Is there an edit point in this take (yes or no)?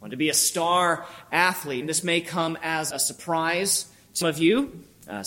yes